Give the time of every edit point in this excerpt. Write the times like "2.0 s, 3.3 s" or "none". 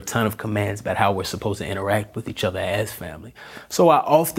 none